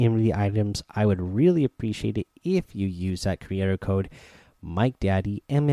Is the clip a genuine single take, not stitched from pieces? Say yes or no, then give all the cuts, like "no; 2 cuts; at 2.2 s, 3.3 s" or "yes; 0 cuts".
yes; 0 cuts